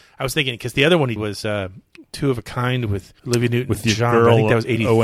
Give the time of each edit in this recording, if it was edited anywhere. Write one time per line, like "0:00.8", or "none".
0:01.2
0:03.2